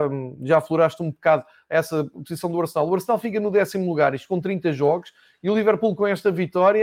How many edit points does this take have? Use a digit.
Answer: 0